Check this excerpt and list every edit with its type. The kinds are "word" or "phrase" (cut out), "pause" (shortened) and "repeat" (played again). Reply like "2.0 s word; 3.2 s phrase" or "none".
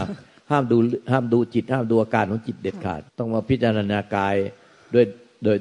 3.1 s pause